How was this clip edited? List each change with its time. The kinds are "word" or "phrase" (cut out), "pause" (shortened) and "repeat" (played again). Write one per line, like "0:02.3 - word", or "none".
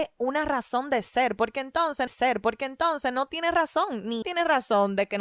0:02.1 - repeat
0:04.2 - word